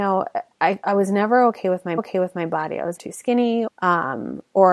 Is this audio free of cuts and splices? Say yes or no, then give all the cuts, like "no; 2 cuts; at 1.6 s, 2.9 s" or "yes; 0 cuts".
no; 3 cuts; at 2.0 s, 3.0 s, 3.7 s